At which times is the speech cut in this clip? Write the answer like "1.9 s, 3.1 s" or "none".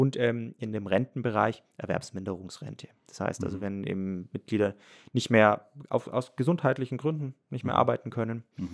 none